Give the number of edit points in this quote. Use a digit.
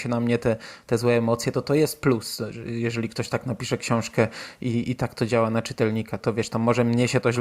1